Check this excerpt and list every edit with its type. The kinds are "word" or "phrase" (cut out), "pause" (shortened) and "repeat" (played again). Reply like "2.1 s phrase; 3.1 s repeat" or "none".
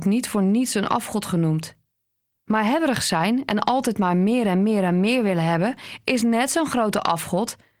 none